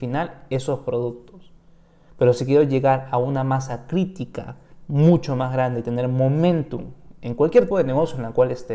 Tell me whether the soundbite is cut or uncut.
cut